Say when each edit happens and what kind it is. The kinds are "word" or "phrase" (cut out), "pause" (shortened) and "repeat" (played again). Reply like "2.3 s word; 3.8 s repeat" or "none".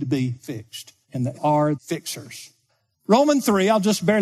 1.0 s pause; 1.3 s word; 1.7 s word; 2.7 s pause